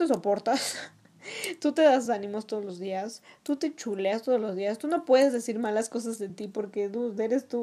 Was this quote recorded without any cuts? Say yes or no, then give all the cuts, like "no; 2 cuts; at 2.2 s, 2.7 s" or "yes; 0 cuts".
yes; 0 cuts